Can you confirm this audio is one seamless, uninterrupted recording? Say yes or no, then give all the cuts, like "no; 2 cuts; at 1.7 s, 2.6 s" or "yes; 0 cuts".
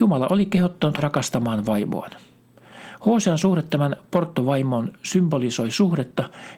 no; 1 cut; at 1.0 s